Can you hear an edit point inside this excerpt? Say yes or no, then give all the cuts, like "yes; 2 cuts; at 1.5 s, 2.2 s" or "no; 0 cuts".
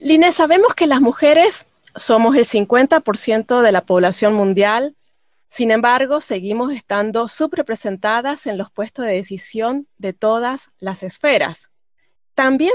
no; 0 cuts